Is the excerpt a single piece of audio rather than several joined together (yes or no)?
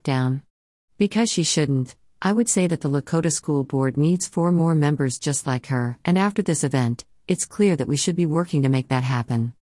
yes